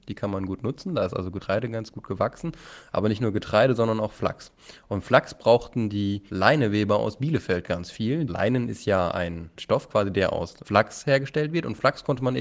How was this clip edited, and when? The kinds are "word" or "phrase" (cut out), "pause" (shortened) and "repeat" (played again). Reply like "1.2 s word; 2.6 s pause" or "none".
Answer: none